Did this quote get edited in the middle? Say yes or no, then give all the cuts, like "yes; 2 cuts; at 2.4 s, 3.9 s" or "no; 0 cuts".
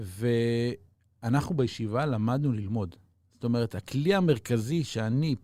no; 0 cuts